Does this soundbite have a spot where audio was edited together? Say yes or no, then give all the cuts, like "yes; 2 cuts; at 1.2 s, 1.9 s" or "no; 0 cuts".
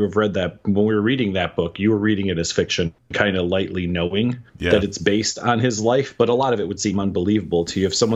yes; 1 cut; at 4.5 s